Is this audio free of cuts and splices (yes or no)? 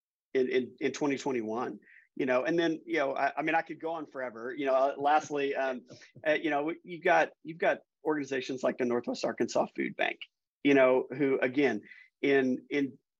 yes